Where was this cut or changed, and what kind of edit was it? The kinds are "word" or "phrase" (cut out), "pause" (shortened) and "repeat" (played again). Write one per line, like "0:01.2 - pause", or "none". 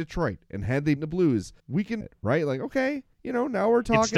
0:01.0 - word
0:01.6 - pause
0:02.0 - phrase
0:03.1 - pause